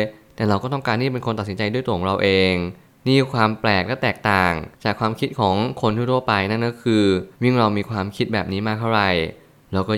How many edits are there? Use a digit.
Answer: 2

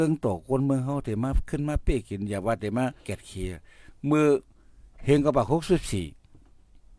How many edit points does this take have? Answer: 1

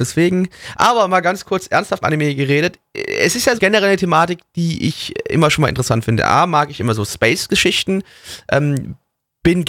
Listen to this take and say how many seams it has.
3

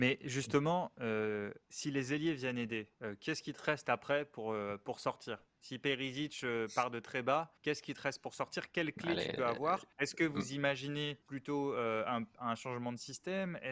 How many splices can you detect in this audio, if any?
5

